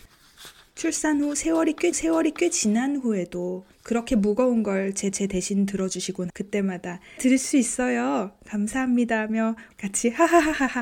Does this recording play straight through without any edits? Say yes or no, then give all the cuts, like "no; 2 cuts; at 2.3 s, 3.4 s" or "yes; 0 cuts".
no; 6 cuts; at 1.9 s, 3.7 s, 5.1 s, 6.3 s, 7.2 s, 9.7 s